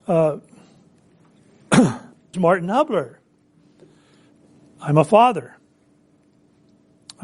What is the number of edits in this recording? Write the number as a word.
two